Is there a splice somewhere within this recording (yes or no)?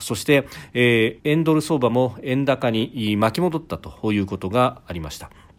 yes